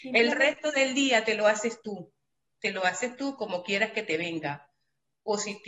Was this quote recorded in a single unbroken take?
yes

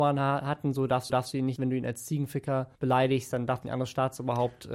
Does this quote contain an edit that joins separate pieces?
yes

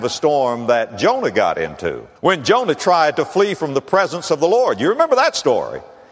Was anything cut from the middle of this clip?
yes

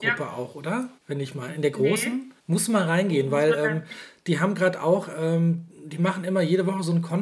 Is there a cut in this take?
yes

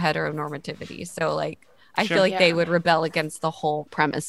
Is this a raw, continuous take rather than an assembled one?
yes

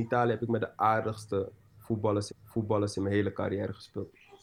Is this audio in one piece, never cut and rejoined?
no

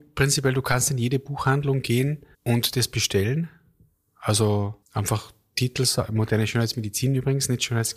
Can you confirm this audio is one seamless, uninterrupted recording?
no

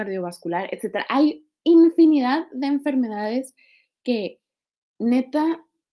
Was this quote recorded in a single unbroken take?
yes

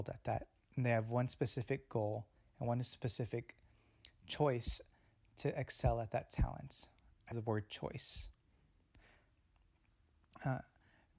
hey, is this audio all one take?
no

